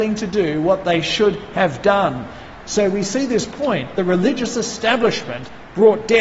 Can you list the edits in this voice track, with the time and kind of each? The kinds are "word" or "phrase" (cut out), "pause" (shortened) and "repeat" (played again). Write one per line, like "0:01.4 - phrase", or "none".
none